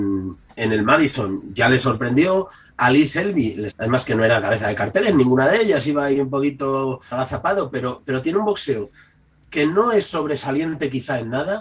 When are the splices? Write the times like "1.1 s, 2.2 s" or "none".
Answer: 3.7 s, 7.1 s